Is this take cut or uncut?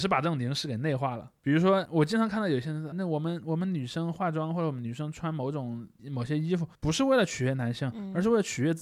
cut